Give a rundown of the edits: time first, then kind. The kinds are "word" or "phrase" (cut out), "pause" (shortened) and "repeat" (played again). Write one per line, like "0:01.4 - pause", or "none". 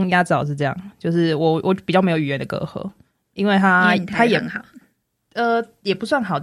none